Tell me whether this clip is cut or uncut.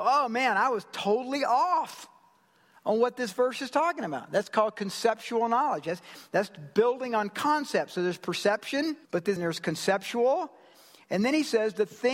cut